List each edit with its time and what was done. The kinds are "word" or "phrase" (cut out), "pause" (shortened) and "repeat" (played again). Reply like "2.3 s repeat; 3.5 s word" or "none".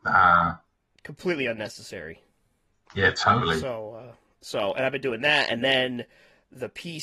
none